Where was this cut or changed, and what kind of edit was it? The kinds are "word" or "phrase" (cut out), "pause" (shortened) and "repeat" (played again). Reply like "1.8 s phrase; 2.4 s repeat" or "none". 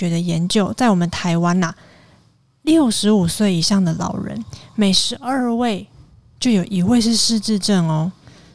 none